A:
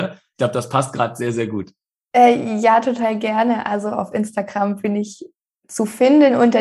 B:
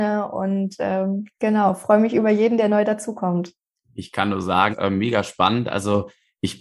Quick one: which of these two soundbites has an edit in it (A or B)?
B